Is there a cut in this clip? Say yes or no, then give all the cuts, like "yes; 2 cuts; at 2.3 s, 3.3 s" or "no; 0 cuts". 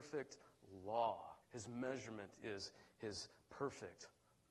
yes; 1 cut; at 1.4 s